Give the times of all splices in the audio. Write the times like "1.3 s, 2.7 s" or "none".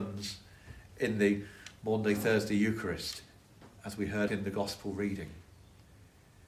3.8 s, 4.3 s